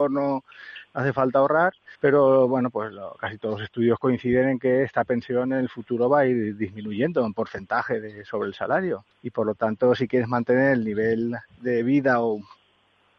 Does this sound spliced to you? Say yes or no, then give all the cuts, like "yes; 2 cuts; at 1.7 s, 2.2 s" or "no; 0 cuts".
yes; 2 cuts; at 1.9 s, 9.1 s